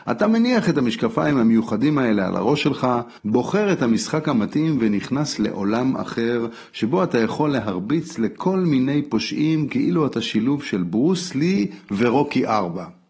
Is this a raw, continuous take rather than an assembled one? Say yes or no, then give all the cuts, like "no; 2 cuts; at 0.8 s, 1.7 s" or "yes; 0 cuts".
no; 1 cut; at 3.2 s